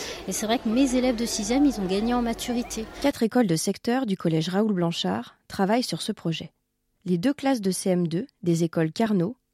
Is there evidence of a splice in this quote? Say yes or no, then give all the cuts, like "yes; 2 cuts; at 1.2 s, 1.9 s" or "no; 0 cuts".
no; 0 cuts